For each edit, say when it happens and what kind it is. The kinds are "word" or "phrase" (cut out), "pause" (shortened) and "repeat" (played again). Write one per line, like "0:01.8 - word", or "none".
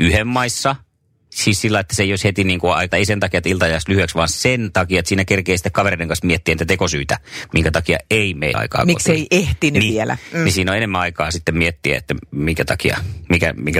0:02.9 - word
0:08.5 - word